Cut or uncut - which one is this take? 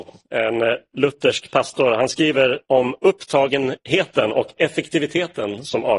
cut